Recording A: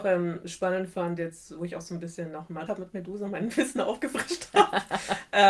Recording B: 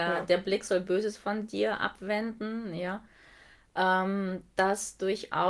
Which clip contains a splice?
A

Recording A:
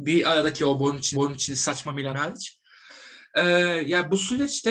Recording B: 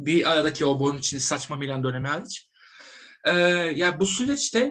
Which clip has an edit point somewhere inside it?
A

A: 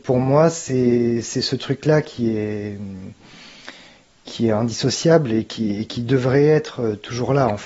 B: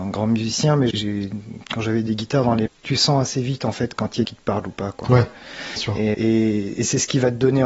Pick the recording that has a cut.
B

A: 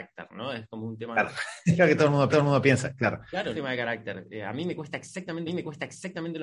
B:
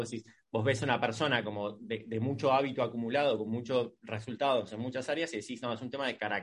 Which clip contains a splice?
A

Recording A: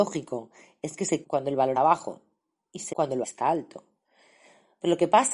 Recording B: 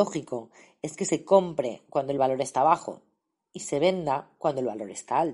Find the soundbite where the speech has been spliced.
A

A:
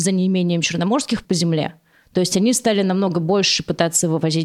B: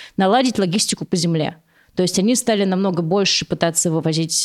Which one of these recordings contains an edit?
A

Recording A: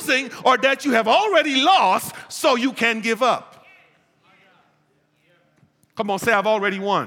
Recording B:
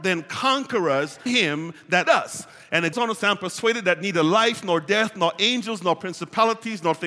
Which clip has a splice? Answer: B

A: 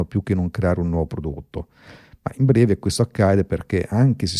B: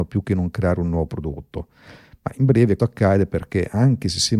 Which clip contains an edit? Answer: B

